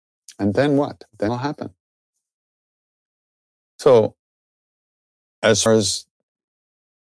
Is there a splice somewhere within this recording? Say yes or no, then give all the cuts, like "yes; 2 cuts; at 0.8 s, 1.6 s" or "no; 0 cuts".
yes; 2 cuts; at 1.3 s, 5.7 s